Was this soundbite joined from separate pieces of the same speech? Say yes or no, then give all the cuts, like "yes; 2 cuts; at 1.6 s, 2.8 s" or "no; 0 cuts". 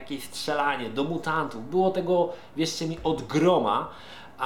no; 0 cuts